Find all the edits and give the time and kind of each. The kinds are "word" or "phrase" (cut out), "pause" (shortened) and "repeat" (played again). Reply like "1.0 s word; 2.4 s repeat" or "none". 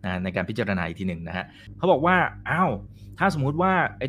none